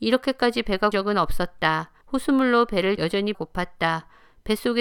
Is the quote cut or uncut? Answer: cut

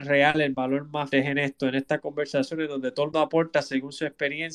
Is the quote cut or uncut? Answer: cut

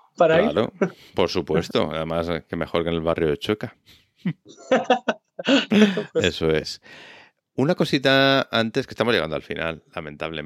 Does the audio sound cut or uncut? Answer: uncut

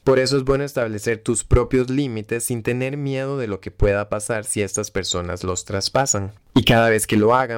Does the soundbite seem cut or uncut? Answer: uncut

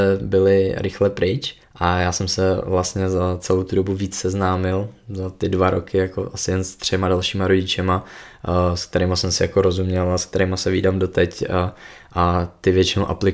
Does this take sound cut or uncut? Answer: cut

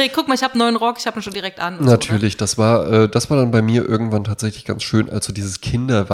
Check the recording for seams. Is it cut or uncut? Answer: uncut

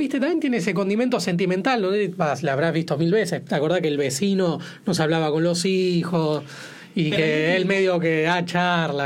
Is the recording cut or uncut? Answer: uncut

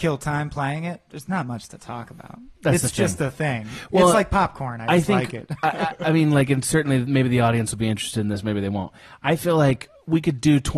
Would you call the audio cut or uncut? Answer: uncut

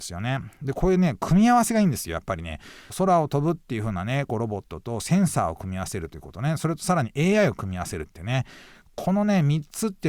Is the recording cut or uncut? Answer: uncut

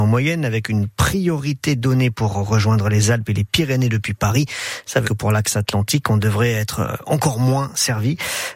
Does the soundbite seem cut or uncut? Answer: cut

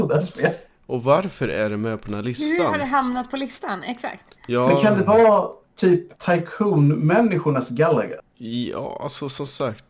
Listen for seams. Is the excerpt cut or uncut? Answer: cut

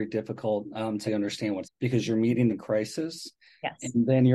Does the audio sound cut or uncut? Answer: cut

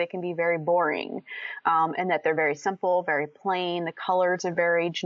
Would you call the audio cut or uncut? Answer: uncut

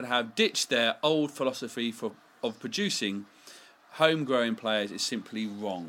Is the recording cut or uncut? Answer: uncut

